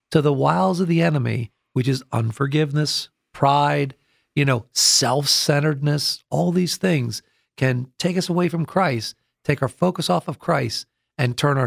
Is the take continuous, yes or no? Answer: yes